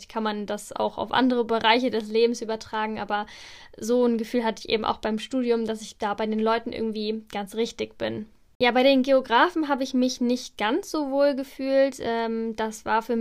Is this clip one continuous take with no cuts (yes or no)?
yes